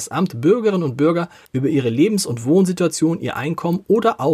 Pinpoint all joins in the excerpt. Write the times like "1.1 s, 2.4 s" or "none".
1.5 s